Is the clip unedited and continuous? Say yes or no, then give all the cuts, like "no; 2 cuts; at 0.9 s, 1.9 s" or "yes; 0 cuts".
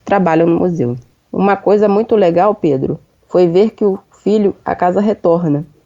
yes; 0 cuts